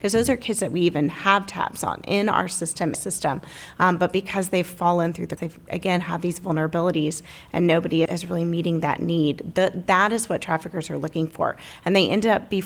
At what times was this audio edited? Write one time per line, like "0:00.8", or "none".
0:02.9
0:05.4
0:08.1